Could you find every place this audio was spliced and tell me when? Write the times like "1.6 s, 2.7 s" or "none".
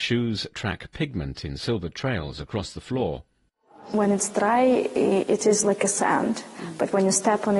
none